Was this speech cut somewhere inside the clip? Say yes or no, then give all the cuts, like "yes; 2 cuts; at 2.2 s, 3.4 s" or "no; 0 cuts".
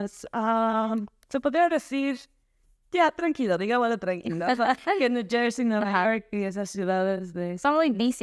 no; 0 cuts